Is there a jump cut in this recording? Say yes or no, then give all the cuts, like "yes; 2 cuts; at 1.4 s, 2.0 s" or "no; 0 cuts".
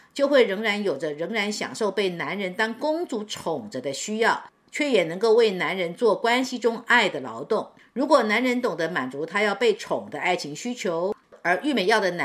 no; 0 cuts